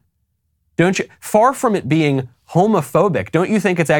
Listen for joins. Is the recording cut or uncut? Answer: uncut